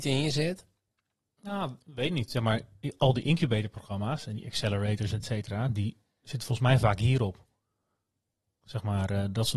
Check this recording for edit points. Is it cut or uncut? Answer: uncut